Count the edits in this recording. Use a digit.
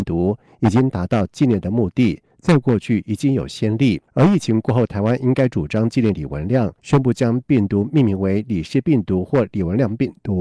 2